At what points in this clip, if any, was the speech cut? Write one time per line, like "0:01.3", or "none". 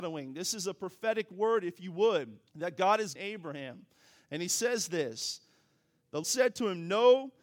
0:02.5
0:03.2
0:06.2